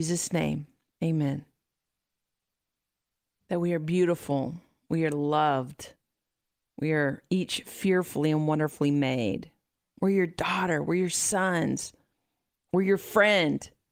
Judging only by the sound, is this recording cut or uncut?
uncut